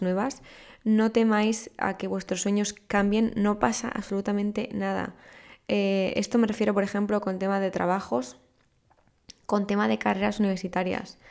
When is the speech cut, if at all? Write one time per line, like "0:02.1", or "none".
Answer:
none

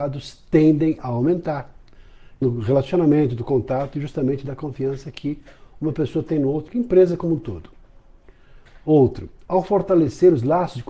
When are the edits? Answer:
0:02.4
0:06.7

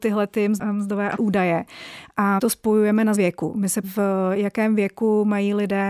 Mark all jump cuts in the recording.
0:01.2
0:02.4
0:03.1
0:03.8

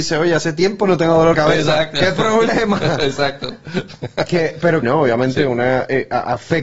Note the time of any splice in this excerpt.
0:01.3
0:04.8

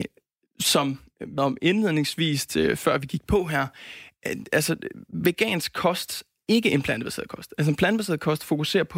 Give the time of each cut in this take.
0:01.4
0:06.4

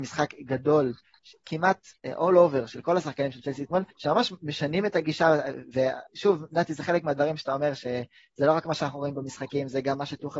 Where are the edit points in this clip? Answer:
0:02.0
0:03.9
0:06.1

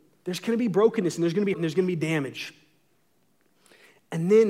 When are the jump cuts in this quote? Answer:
0:01.5

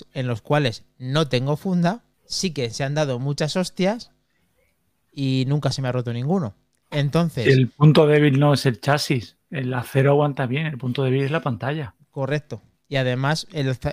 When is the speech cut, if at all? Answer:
0:02.1

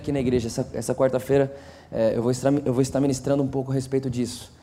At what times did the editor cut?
none

